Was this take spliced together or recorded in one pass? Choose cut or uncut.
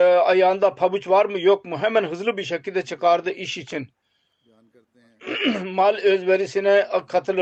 uncut